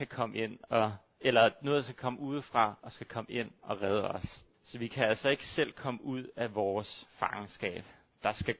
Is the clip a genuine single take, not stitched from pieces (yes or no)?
no